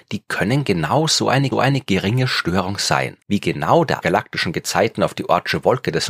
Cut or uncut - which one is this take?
cut